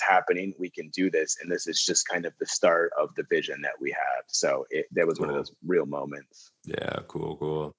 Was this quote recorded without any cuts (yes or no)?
yes